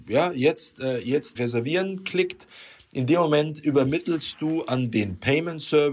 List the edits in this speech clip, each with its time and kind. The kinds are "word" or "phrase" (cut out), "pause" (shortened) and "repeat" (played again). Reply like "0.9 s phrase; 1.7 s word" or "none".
1.4 s word